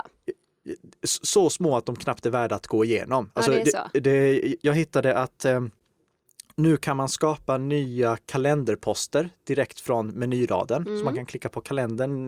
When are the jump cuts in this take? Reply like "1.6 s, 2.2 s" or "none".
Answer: none